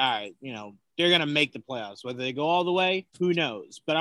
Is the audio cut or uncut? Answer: cut